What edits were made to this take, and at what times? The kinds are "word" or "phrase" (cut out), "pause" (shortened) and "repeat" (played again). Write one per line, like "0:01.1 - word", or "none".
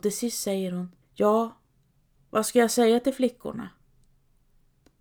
0:01.0 - pause